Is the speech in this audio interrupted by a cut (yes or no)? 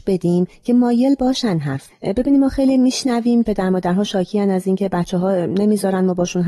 yes